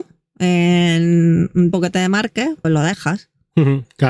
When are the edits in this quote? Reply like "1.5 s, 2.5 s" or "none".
1.7 s, 2.6 s